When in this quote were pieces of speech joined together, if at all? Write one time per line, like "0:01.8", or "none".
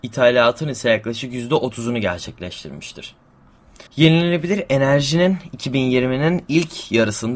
0:03.9